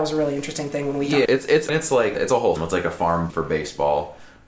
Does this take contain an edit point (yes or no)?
yes